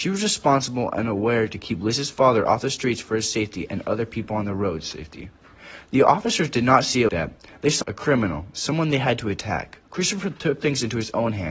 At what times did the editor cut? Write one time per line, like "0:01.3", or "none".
0:07.1
0:07.8
0:09.9

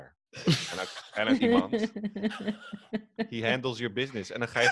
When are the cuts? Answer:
0:01.4

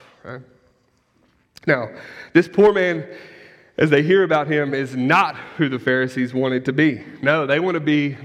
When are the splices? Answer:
none

